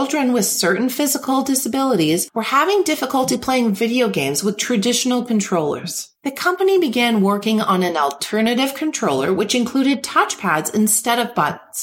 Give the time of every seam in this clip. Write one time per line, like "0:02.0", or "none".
0:06.1

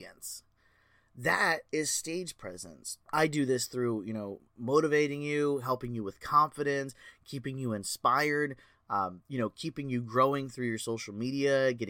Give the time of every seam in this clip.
0:03.0
0:09.2

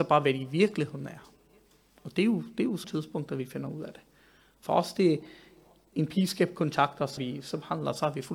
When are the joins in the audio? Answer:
0:02.8
0:07.2

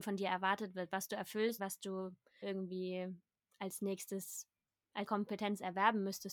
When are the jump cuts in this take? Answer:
0:01.6
0:02.4
0:05.1

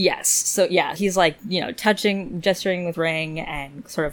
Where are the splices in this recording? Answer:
0:01.0
0:02.9

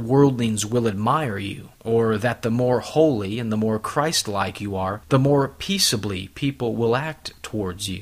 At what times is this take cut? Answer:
0:01.7
0:05.0

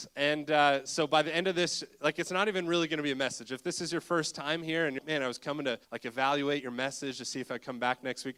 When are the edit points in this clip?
0:05.0
0:05.8

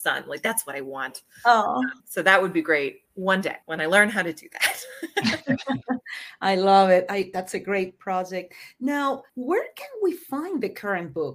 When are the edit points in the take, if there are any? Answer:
0:02.0
0:03.1
0:03.6
0:09.3

